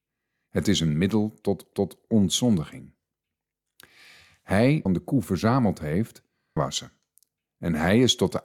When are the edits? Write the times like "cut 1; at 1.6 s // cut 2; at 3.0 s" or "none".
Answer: cut 1; at 1.7 s // cut 2; at 4.9 s // cut 3; at 6.6 s